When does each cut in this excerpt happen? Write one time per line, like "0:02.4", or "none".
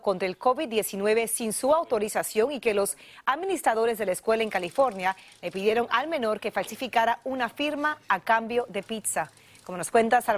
none